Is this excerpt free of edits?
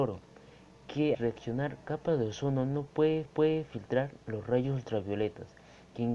no; 3 cuts; at 1.1 s, 1.8 s, 3.2 s

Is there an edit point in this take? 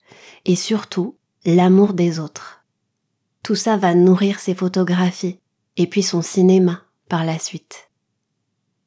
no; 0 cuts

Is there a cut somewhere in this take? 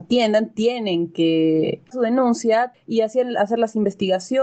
yes; 2 cuts; at 1.9 s, 2.7 s

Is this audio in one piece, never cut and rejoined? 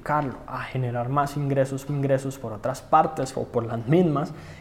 no; 1 cut; at 1.9 s

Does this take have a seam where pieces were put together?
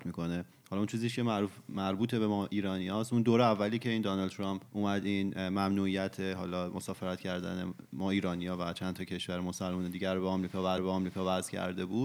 yes; 2 cuts; at 4.7 s, 10.8 s

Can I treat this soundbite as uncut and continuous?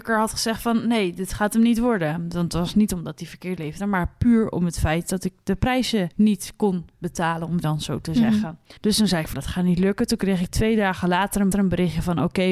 no; 6 cuts; at 3.6 s, 6.1 s, 7.6 s, 8.8 s, 9.3 s, 11.5 s

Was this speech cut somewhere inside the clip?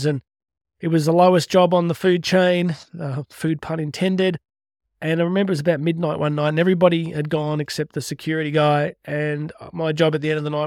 no; 0 cuts

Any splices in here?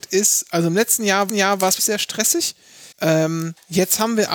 yes; 3 cuts; at 1.3 s, 1.8 s, 2.9 s

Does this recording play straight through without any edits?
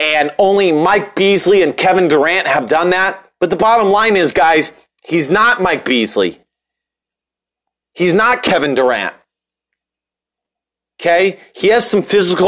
yes; 0 cuts

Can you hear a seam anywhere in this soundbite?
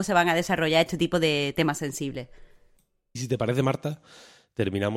no; 0 cuts

